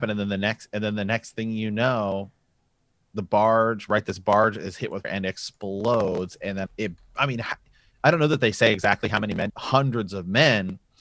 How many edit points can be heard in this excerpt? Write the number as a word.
three